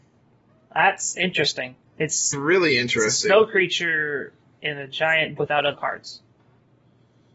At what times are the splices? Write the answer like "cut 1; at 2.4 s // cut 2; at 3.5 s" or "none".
cut 1; at 2.3 s // cut 2; at 4.4 s // cut 3; at 5.4 s // cut 4; at 5.7 s